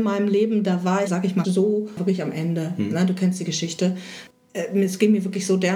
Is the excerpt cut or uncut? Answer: cut